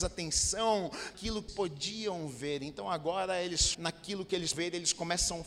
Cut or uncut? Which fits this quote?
cut